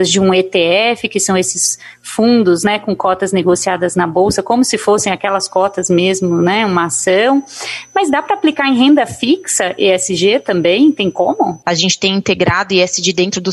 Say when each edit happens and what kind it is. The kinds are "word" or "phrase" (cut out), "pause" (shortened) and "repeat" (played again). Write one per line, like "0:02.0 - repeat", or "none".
none